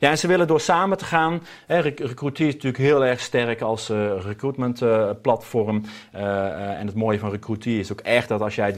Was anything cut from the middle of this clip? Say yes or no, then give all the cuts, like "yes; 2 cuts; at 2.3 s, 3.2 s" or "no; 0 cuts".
no; 0 cuts